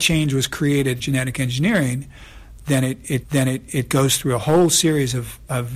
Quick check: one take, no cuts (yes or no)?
no